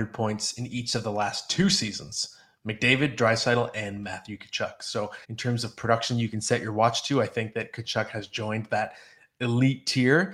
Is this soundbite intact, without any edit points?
no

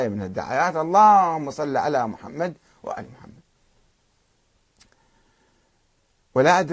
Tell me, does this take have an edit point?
no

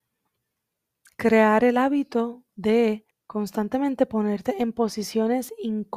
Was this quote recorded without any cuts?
no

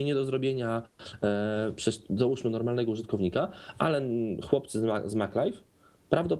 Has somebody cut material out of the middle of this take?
no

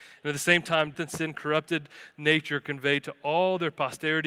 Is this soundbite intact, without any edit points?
no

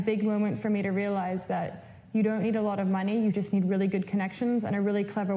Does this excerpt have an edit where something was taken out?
no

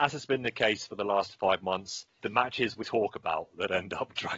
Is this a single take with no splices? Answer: no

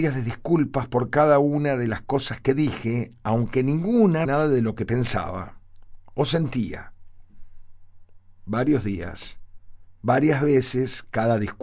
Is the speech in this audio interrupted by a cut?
yes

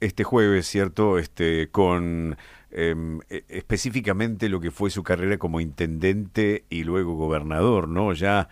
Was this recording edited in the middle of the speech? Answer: no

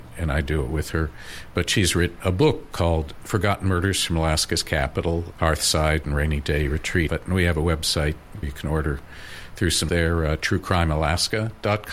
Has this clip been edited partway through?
yes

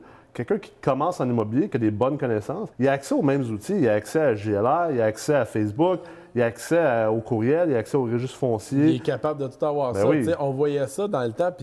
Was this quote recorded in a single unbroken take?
no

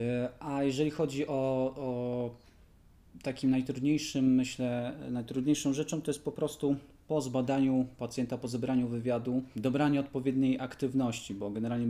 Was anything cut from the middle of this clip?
no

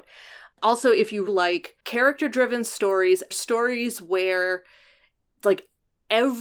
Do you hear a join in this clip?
yes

